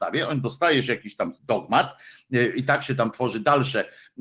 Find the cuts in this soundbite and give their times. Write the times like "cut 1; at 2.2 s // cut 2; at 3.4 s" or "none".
cut 1; at 1.4 s